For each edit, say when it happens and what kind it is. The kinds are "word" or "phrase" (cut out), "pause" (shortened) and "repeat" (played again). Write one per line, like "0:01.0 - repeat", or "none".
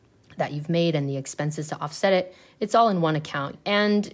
none